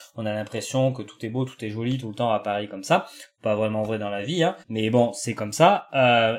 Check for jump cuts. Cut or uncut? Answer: cut